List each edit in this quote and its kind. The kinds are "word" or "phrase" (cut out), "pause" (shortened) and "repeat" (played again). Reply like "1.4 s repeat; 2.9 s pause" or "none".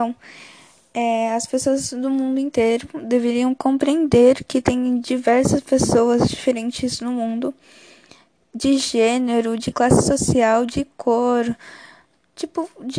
none